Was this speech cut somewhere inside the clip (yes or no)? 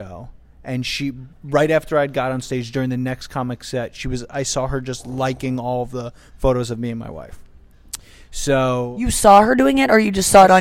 yes